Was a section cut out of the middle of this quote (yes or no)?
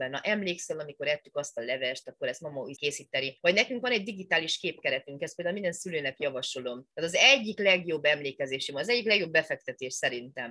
yes